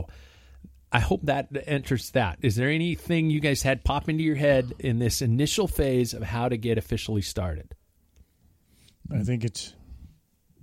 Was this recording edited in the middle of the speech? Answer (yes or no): no